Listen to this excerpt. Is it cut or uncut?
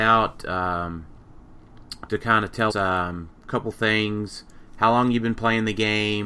cut